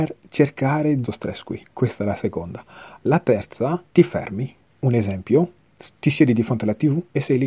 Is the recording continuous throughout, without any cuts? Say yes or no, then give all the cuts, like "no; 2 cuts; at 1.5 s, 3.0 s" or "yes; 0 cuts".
no; 2 cuts; at 1.0 s, 3.9 s